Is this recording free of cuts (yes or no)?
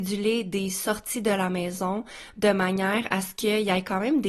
yes